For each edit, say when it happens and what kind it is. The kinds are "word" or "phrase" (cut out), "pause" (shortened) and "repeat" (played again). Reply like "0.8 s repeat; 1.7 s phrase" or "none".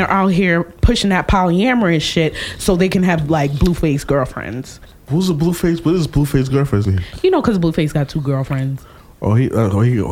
none